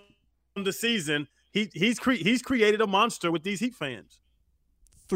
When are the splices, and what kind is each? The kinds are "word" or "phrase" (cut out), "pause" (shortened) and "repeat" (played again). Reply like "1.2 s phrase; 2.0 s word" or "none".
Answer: none